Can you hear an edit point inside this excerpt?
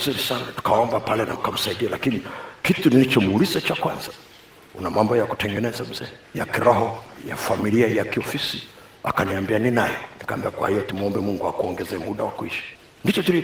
yes; 1 cut; at 1.4 s

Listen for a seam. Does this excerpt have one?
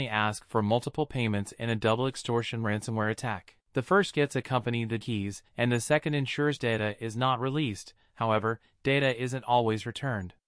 yes; 3 cuts; at 3.6 s, 5.0 s, 5.5 s

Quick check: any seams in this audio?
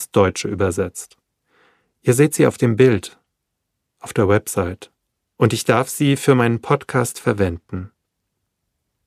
no; 0 cuts

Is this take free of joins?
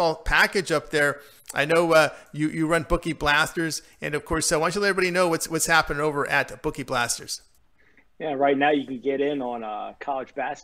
no; 1 cut; at 7.6 s

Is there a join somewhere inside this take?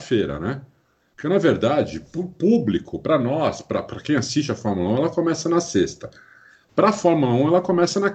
no; 0 cuts

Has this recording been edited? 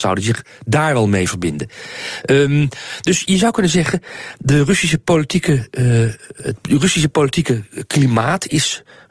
no; 0 cuts

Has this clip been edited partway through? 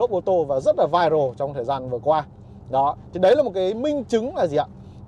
no; 0 cuts

